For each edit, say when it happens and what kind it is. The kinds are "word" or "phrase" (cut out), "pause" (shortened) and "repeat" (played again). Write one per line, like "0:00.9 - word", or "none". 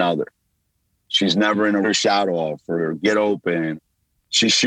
0:01.8 - phrase